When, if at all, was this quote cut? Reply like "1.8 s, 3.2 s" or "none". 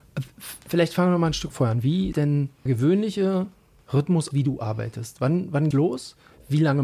1.5 s, 2.1 s, 2.7 s, 4.3 s, 5.7 s